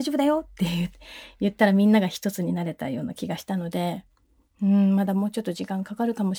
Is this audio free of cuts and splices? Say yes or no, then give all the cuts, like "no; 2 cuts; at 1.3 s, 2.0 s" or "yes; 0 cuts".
yes; 0 cuts